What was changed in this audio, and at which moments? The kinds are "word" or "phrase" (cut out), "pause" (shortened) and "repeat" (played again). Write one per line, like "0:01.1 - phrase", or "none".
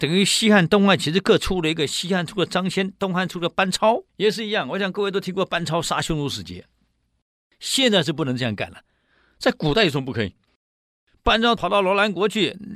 0:04.1 - pause